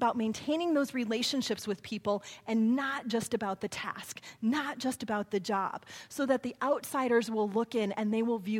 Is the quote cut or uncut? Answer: uncut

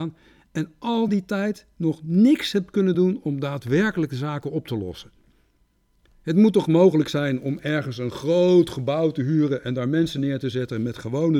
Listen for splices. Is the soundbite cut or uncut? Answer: uncut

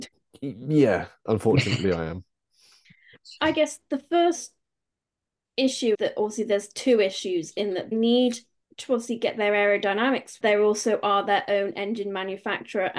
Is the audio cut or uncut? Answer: cut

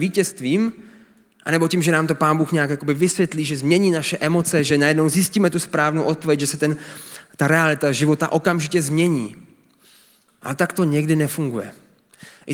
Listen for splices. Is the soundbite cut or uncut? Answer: uncut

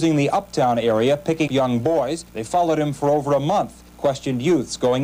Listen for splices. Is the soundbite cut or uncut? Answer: cut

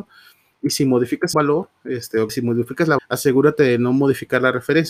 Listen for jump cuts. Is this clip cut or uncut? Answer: cut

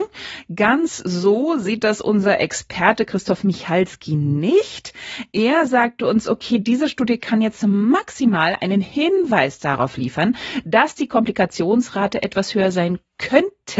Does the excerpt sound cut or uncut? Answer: uncut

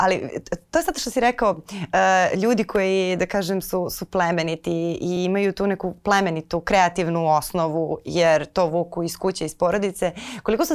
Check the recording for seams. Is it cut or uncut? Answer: uncut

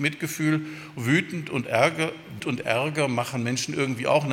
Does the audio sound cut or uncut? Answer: cut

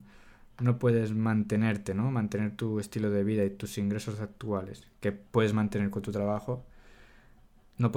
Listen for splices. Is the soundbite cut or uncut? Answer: cut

